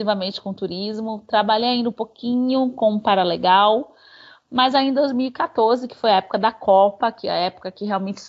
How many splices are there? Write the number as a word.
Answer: zero